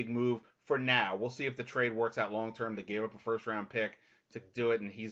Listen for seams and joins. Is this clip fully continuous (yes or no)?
yes